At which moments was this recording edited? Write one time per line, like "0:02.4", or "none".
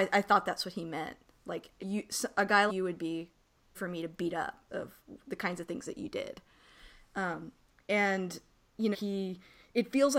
0:01.8
0:02.7
0:03.7
0:04.7
0:08.9